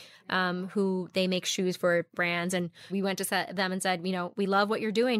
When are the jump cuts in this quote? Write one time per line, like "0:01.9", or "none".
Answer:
0:02.1
0:02.9